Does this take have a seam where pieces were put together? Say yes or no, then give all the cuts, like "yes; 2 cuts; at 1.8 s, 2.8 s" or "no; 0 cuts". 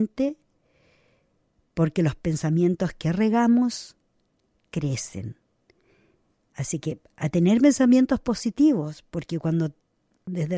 no; 0 cuts